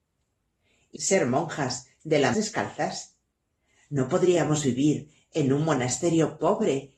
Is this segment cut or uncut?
cut